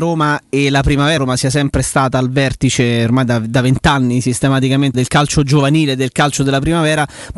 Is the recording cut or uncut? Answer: cut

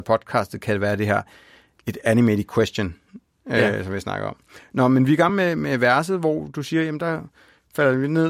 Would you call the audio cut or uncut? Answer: uncut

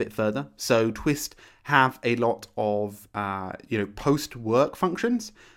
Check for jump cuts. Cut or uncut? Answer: uncut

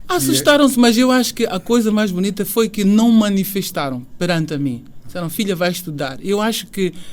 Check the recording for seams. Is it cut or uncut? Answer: uncut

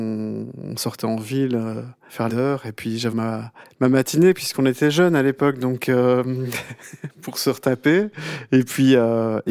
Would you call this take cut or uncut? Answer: cut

